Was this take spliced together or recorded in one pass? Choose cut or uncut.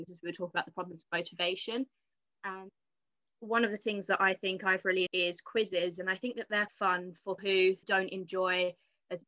cut